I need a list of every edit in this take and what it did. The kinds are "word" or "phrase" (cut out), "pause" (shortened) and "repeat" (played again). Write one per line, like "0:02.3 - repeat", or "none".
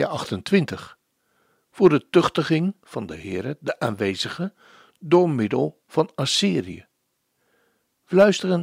none